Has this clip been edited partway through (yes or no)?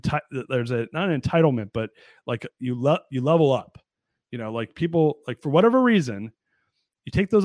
no